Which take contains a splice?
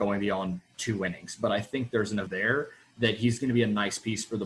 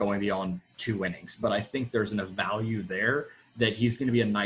first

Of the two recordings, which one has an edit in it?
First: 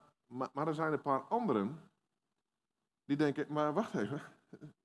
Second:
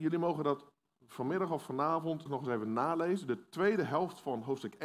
second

